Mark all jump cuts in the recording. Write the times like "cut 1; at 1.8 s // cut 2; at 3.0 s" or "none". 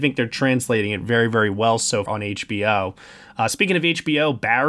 cut 1; at 2.1 s